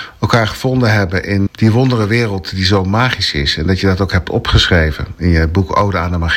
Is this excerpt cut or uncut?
cut